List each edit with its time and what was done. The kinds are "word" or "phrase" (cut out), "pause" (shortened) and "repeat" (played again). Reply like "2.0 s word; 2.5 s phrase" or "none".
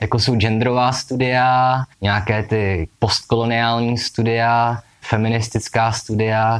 1.9 s pause; 2.9 s pause